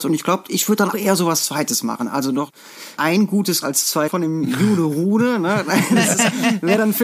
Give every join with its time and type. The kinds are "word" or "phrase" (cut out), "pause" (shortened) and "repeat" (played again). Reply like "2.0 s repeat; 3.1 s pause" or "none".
0.9 s word; 3.0 s word; 3.6 s word; 4.1 s word